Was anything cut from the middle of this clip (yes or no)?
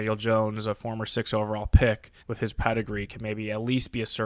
yes